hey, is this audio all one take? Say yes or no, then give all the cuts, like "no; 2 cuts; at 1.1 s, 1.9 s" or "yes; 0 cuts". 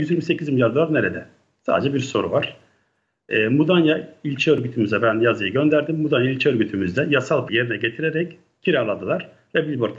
no; 1 cut; at 7.5 s